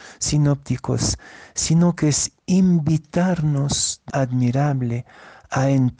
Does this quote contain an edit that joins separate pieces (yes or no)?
yes